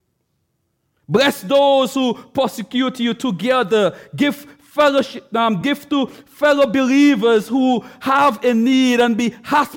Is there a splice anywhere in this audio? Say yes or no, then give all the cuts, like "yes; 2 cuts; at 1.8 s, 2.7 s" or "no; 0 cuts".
no; 0 cuts